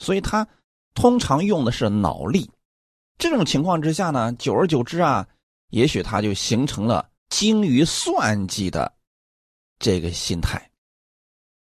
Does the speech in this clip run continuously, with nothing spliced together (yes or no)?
no